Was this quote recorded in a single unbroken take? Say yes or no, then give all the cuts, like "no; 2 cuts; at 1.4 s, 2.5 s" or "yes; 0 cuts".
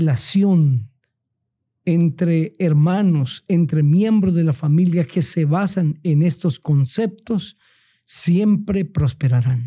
yes; 0 cuts